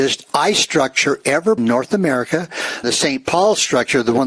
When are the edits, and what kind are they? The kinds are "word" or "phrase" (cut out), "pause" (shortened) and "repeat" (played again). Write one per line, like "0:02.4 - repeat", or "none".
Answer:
0:01.6 - phrase
0:02.8 - phrase